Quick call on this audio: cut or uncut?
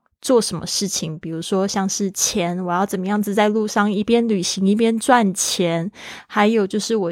uncut